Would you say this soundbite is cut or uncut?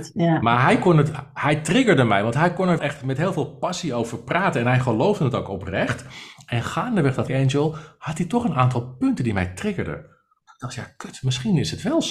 cut